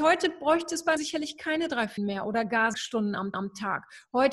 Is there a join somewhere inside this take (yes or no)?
yes